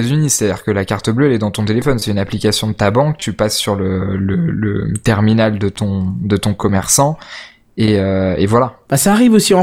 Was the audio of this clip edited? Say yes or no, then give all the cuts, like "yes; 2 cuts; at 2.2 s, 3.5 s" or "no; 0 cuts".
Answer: no; 0 cuts